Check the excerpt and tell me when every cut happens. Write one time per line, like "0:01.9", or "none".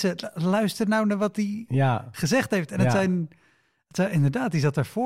none